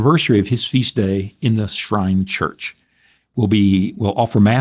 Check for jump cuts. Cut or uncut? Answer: uncut